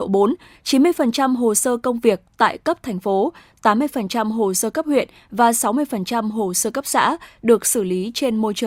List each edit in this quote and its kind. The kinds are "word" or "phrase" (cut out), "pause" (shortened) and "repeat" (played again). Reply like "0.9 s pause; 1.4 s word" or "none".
none

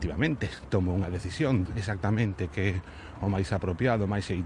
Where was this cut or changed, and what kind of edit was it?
1.7 s word

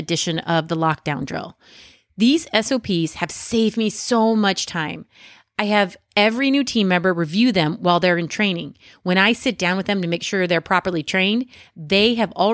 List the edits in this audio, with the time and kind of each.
none

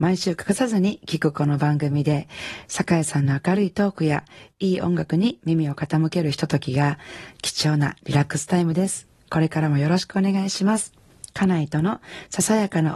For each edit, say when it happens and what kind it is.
none

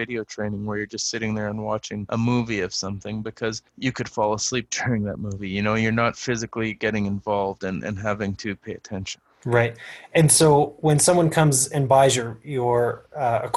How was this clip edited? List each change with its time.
3.7 s pause

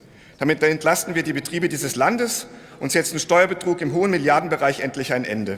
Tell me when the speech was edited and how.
none

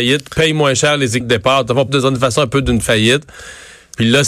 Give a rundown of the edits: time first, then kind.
1.2 s word; 1.9 s word

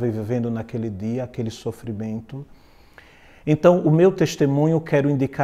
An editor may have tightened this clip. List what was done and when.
none

